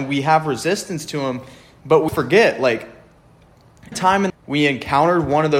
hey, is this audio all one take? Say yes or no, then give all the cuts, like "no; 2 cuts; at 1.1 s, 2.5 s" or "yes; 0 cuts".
no; 3 cuts; at 2.1 s, 3.9 s, 4.3 s